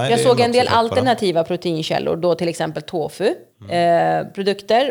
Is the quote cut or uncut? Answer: uncut